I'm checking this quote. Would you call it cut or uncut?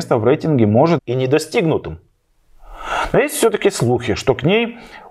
cut